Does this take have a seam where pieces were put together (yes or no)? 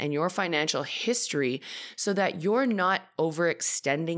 no